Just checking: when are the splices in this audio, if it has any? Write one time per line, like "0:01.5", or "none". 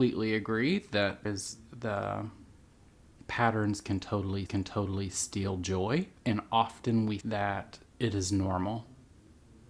0:01.2
0:04.5
0:06.2
0:07.2
0:07.9